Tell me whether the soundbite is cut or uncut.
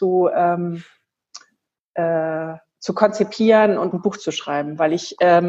cut